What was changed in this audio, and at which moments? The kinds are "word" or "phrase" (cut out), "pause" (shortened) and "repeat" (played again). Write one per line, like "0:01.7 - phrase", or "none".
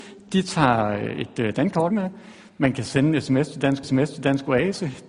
0:01.9 - phrase
0:03.8 - repeat